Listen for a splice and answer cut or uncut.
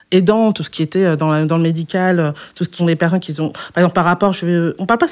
cut